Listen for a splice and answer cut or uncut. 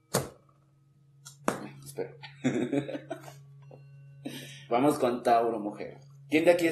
cut